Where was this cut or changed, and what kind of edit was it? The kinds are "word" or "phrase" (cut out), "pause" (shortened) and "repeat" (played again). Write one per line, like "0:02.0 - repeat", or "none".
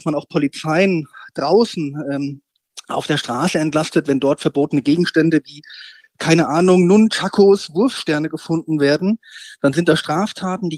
none